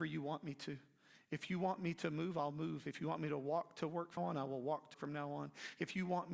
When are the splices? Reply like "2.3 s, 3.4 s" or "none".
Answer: 4.2 s, 4.9 s